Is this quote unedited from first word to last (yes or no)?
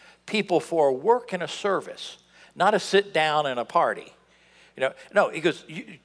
yes